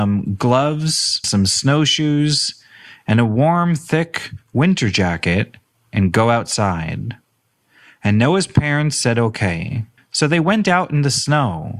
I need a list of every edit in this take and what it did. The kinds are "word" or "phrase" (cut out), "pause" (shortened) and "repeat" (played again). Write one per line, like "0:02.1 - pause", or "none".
0:01.2 - word
0:10.0 - pause